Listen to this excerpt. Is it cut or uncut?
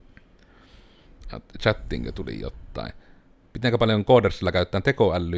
uncut